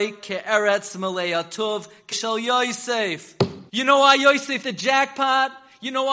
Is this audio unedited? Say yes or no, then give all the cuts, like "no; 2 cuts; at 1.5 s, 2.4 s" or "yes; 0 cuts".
no; 3 cuts; at 2.1 s, 3.7 s, 4.6 s